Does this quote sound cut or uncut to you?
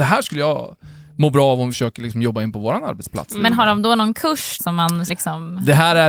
cut